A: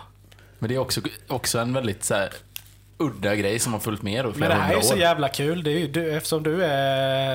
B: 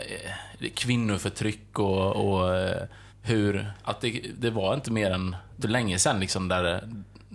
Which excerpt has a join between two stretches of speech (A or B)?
B